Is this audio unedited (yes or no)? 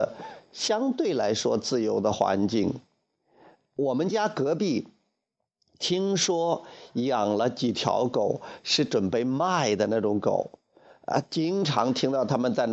yes